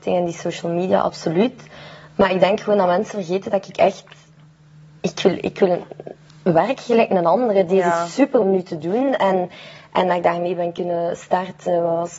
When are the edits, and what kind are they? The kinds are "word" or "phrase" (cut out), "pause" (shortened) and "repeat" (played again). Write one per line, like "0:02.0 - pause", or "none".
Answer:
0:08.4 - word

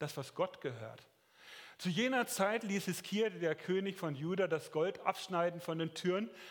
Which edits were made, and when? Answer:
none

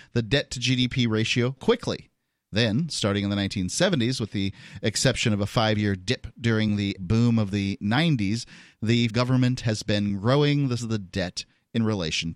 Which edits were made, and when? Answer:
0:01.6 - word
0:07.0 - word
0:09.1 - word
0:10.8 - word

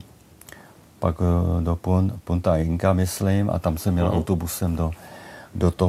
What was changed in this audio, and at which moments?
none

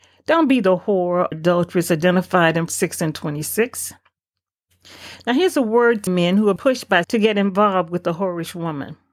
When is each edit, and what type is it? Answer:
0:01.3 - word
0:02.7 - word
0:06.1 - word
0:06.6 - word
0:07.0 - word

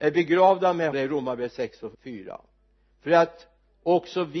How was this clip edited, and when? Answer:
0:00.9 - phrase
0:01.9 - pause

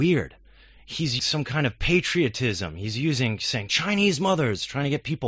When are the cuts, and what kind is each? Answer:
0:01.2 - word

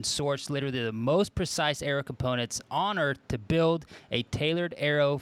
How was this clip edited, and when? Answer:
none

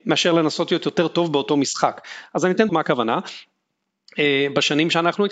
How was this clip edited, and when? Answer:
0:02.7 - word

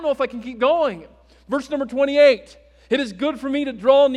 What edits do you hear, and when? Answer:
none

